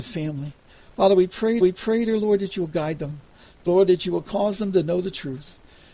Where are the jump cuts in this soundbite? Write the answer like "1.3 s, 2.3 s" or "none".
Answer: 1.6 s, 3.7 s